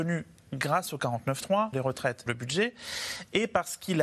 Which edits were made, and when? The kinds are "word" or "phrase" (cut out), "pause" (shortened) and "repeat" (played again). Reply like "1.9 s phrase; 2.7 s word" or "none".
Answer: 1.7 s word; 2.3 s word